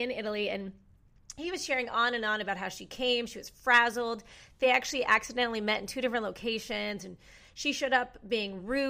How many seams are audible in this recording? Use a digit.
0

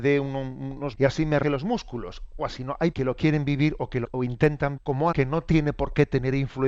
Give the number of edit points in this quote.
7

